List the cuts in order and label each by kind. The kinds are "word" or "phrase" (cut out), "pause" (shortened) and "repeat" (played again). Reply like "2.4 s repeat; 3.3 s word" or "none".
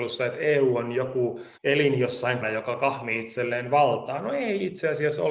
1.6 s pause; 2.4 s word